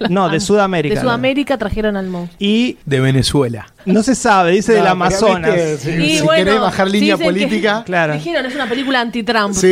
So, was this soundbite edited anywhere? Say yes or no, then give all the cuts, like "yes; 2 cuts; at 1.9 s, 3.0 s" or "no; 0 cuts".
no; 0 cuts